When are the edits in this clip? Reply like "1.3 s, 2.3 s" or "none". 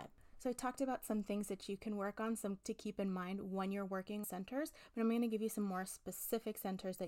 2.6 s, 4.2 s